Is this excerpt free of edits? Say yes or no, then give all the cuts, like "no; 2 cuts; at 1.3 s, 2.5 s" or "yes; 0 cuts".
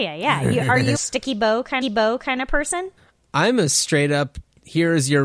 no; 3 cuts; at 0.9 s, 1.8 s, 3.0 s